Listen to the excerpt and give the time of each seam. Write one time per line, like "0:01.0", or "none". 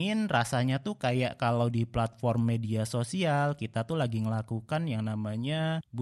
none